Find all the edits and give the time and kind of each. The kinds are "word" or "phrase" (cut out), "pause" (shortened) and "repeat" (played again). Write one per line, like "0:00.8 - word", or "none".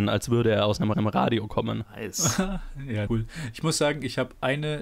0:00.9 - repeat
0:03.1 - word